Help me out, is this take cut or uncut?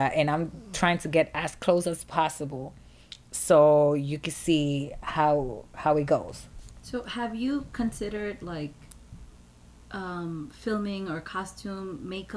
uncut